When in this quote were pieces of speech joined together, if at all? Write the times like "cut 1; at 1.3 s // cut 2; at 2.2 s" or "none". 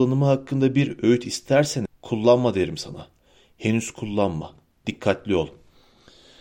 cut 1; at 1.9 s